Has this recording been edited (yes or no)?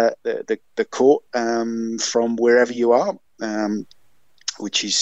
no